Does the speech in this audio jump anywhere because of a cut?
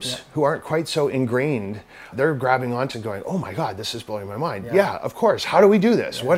yes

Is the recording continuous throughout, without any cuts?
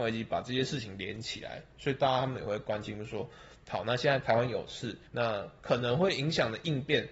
no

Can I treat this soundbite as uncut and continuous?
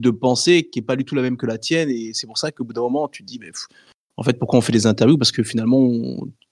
yes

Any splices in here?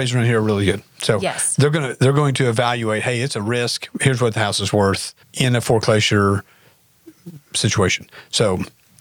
yes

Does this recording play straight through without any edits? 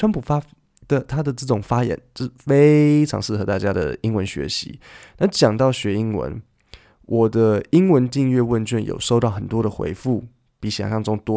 yes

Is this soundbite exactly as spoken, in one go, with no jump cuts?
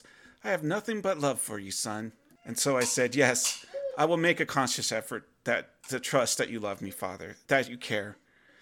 yes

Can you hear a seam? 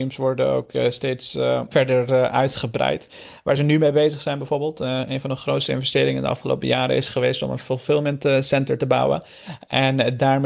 no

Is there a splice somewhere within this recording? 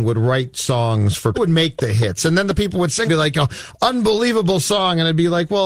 yes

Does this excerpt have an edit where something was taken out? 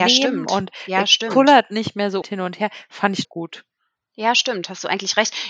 yes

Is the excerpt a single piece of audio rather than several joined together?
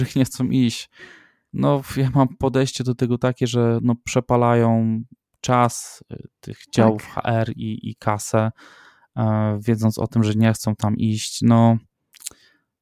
yes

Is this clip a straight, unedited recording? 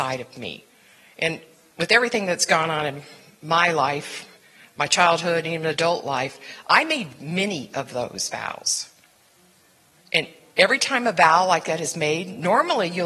yes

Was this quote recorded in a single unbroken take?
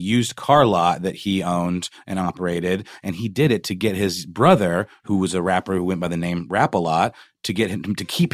yes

